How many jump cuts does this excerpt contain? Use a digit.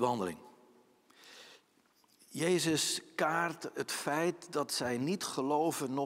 0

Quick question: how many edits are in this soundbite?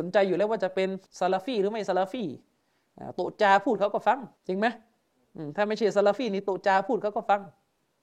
2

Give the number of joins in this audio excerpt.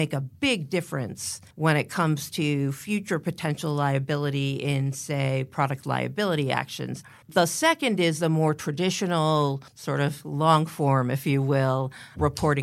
3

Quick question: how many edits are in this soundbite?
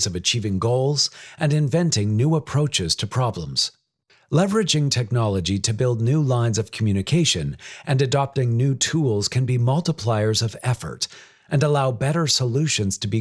1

